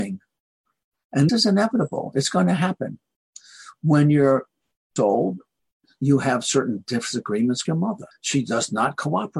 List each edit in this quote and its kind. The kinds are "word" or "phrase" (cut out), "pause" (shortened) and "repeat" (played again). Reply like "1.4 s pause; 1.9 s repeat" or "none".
1.3 s word; 5.0 s phrase; 7.6 s word; 8.1 s pause